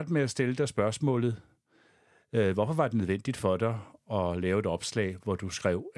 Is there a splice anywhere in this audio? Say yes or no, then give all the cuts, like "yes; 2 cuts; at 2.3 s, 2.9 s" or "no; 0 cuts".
no; 0 cuts